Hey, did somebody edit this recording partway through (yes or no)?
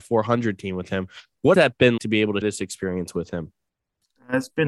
yes